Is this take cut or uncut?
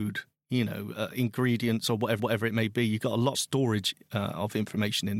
cut